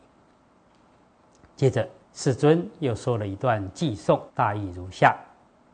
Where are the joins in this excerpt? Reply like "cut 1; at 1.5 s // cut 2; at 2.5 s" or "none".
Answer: cut 1; at 2.0 s // cut 2; at 4.3 s